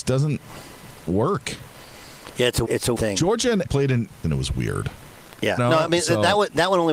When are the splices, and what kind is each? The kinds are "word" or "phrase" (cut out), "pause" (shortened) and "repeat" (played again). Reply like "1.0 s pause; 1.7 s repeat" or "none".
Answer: 1.1 s word; 2.6 s word; 2.9 s word; 3.6 s word; 4.2 s word; 5.6 s word

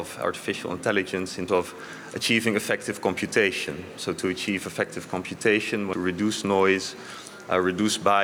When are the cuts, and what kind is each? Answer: 1.5 s word; 5.9 s word

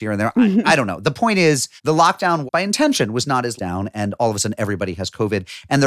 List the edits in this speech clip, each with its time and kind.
1.8 s pause; 2.5 s word; 3.6 s word

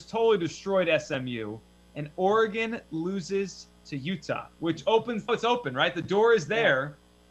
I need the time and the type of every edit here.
5.3 s word

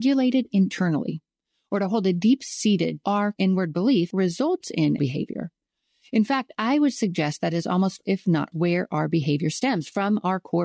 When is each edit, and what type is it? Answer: 3.0 s word; 3.3 s word; 4.1 s word; 5.0 s word; 8.0 s word; 8.5 s word

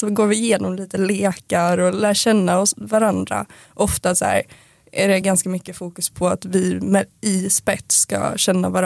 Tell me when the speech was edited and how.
none

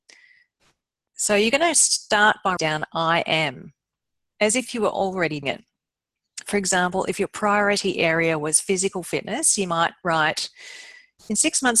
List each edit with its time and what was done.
2.6 s word; 5.4 s word

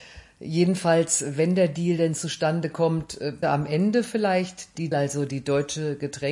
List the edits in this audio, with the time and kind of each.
3.4 s word; 4.9 s word

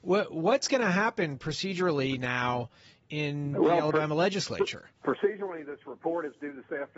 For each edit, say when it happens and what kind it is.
5.0 s pause

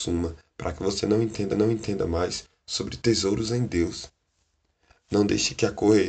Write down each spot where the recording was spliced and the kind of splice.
1.5 s repeat

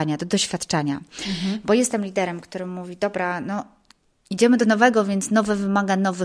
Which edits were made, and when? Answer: none

